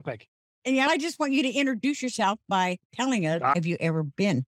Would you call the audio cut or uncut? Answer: uncut